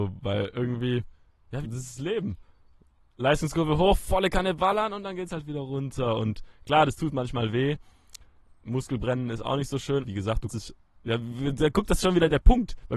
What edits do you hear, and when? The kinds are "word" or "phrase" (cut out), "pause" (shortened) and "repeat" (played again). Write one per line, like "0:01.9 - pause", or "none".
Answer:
0:01.6 - phrase
0:10.0 - word
0:10.5 - word

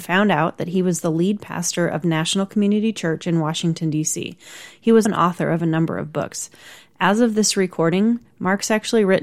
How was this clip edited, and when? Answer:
0:05.1 - word

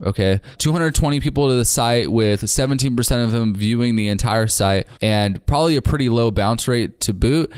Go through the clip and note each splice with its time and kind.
none

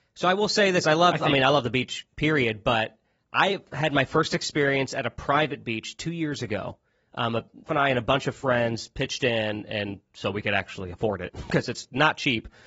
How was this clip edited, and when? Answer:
0:07.7 - word

